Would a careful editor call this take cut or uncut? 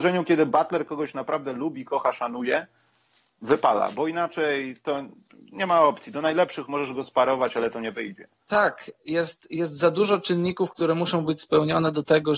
uncut